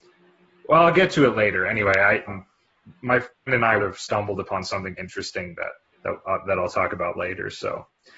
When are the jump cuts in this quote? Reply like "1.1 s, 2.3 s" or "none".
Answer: 2.3 s, 3.5 s, 3.8 s, 5.0 s, 5.8 s